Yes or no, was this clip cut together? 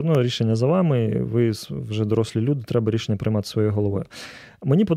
no